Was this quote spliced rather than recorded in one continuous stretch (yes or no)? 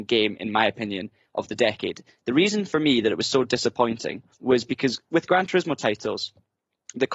yes